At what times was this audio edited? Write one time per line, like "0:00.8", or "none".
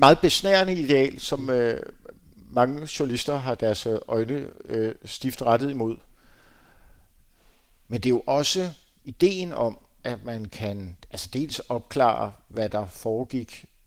none